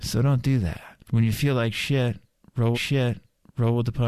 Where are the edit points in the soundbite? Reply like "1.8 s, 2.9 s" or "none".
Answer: 1.0 s, 2.7 s